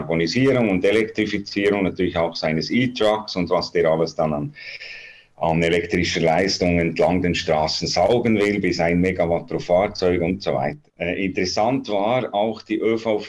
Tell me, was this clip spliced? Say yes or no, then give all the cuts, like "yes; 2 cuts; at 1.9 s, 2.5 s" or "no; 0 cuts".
yes; 1 cut; at 10.9 s